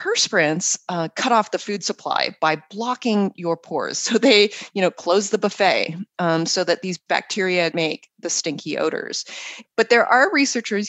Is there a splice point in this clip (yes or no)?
yes